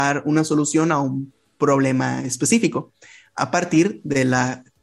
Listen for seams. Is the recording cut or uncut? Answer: uncut